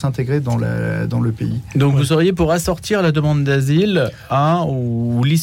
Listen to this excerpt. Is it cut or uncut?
uncut